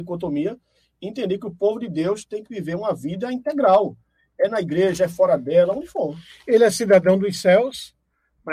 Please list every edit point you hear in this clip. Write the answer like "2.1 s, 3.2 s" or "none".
none